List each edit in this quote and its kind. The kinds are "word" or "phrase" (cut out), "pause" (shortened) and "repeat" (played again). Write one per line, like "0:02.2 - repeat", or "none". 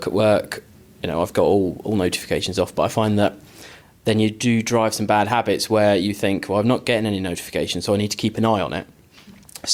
none